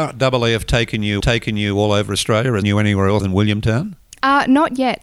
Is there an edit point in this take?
yes; 3 cuts; at 1.2 s, 2.6 s, 3.2 s

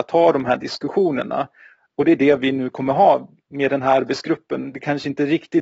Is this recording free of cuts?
yes; 0 cuts

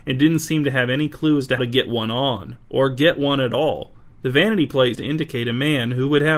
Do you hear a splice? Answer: yes; 3 cuts; at 1.6 s, 4.1 s, 4.9 s

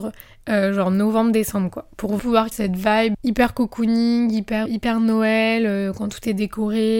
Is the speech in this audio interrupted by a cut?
yes; 4 cuts; at 2.2 s, 2.5 s, 3.1 s, 4.7 s

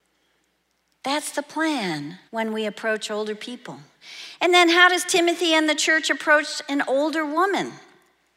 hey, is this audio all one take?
no; 1 cut; at 2.3 s

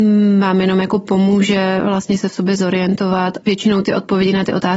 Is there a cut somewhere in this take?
yes; 1 cut; at 3.4 s

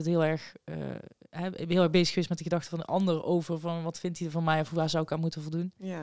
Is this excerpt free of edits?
yes; 0 cuts

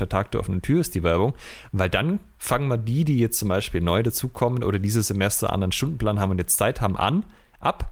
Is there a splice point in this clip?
no; 0 cuts

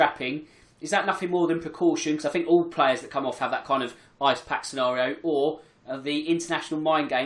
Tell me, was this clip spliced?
no; 0 cuts

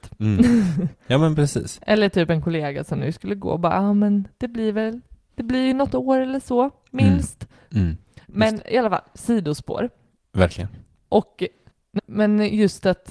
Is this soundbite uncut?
no; 1 cut; at 12.0 s

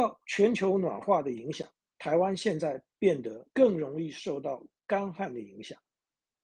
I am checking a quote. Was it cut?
yes; 2 cuts; at 1.8 s, 3.5 s

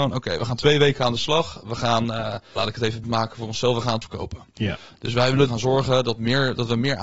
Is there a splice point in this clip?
yes; 4 cuts; at 2.6 s, 3.0 s, 4.0 s, 5.5 s

